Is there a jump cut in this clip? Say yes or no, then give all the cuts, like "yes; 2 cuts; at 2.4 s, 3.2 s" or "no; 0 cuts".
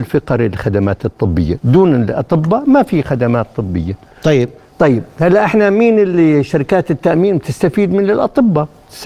no; 0 cuts